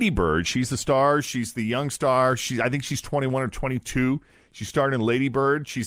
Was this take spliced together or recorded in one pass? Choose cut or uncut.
uncut